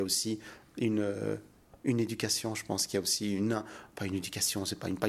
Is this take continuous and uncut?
yes; 0 cuts

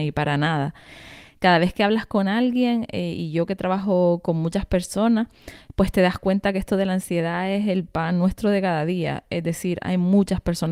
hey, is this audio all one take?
yes; 0 cuts

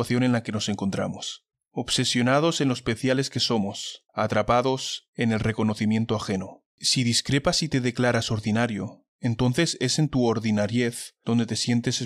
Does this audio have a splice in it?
yes; 3 cuts; at 1.5 s, 4.1 s, 6.7 s

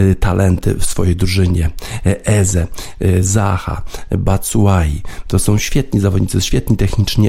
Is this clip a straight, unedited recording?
yes; 0 cuts

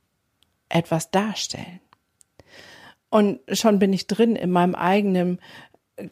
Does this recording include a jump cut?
no; 0 cuts

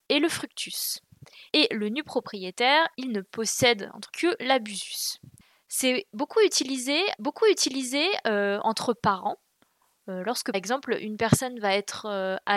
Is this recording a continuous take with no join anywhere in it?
no; 5 cuts; at 1.5 s, 2.9 s, 4.1 s, 7.2 s, 10.5 s

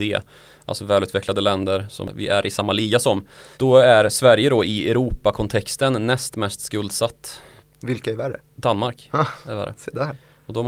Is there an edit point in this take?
yes; 2 cuts; at 3.5 s, 7.6 s

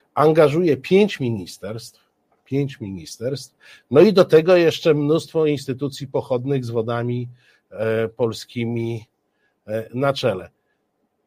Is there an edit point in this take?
no; 0 cuts

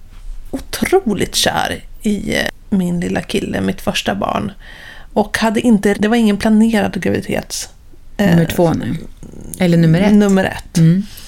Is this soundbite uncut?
no; 1 cut; at 5.9 s

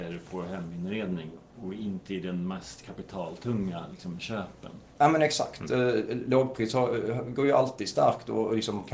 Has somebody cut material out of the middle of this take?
no; 0 cuts

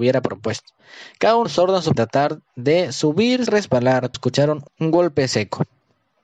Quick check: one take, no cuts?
no; 4 cuts; at 1.5 s, 2.0 s, 3.5 s, 4.1 s

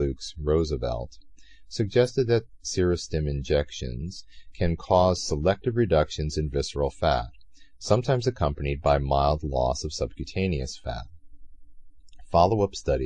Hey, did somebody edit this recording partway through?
no; 0 cuts

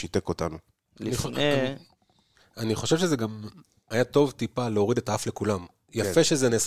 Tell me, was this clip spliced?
no; 0 cuts

